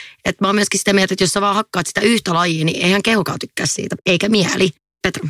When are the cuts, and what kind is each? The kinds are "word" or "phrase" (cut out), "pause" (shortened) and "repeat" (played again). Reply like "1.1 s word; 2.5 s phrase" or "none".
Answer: none